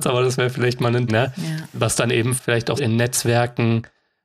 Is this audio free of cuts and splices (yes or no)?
no